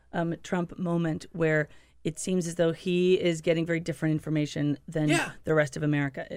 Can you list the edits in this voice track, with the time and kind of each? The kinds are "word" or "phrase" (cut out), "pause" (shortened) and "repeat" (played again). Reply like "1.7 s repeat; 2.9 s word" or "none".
none